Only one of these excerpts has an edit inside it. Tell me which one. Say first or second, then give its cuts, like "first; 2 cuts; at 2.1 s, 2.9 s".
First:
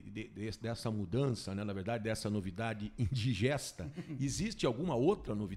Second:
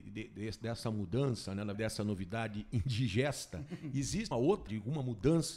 second; 3 cuts; at 1.7 s, 4.3 s, 4.7 s